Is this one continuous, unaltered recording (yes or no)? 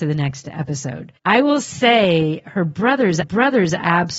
no